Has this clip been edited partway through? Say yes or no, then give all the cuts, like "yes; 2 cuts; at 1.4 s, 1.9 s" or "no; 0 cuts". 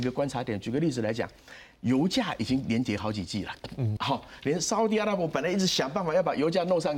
yes; 1 cut; at 4.0 s